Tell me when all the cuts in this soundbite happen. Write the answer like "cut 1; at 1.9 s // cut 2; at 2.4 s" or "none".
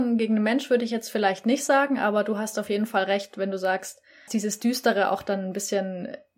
cut 1; at 4.3 s